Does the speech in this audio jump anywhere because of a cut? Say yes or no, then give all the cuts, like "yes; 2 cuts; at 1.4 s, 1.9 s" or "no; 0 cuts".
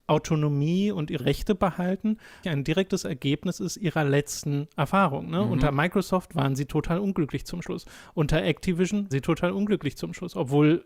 yes; 3 cuts; at 1.2 s, 2.4 s, 9.1 s